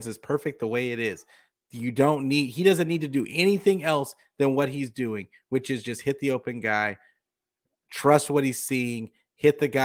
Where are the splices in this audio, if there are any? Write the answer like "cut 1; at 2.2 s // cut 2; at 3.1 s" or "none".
none